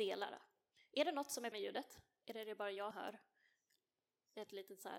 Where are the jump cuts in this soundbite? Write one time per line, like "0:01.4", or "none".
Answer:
0:01.5
0:02.9